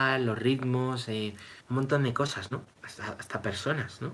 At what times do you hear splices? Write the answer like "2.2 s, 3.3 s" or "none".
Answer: 1.6 s, 2.7 s